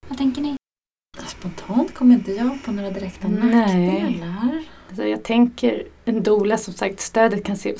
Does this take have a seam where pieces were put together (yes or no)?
no